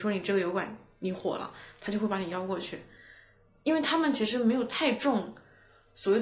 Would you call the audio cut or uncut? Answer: uncut